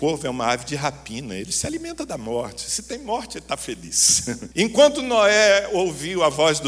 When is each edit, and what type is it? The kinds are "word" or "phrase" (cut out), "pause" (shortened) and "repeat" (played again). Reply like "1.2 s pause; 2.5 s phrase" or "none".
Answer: 4.5 s pause